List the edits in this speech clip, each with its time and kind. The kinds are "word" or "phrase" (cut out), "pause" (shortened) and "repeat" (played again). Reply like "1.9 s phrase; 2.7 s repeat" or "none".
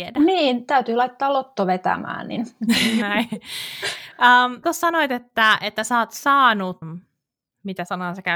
3.0 s word; 4.6 s word; 6.8 s phrase